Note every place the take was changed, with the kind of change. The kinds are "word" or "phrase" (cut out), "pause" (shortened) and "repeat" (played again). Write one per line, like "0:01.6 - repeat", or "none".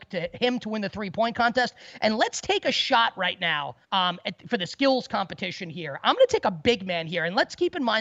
0:03.8 - pause